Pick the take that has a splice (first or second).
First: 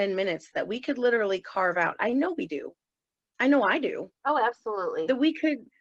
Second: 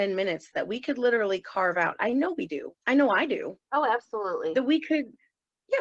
second